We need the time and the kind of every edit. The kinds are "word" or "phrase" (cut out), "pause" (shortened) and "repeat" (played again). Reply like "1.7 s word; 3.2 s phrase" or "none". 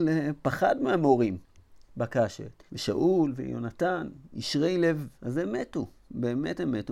2.7 s pause; 5.2 s pause